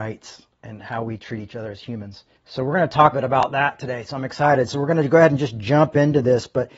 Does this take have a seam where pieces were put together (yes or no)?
yes